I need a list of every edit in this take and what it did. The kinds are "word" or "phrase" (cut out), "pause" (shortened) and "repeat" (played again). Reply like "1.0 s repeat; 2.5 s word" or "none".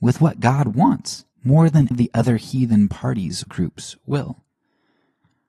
1.3 s pause; 1.9 s word; 3.5 s word